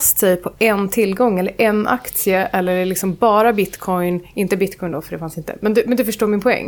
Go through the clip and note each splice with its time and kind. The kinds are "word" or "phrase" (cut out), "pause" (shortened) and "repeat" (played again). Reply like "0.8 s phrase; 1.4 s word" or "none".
none